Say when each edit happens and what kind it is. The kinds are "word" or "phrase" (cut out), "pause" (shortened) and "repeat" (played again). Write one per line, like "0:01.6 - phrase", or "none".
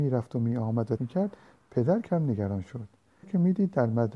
0:01.0 - word
0:02.0 - word
0:03.2 - word